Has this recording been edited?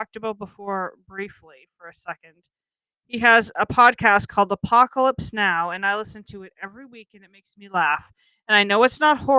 no; 0 cuts

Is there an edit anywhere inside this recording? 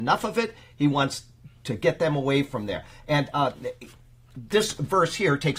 no; 0 cuts

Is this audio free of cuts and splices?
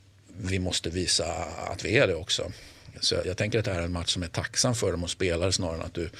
no; 1 cut; at 3.2 s

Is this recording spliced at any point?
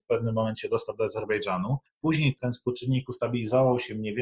no; 0 cuts

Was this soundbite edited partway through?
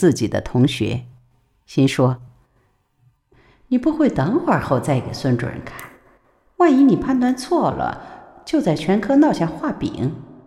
no; 0 cuts

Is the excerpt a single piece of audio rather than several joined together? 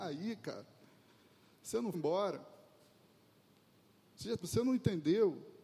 no; 2 cuts; at 1.9 s, 4.4 s

